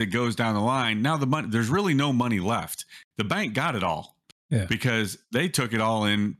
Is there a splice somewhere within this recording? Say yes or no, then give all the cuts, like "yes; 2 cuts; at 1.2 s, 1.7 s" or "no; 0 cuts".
no; 0 cuts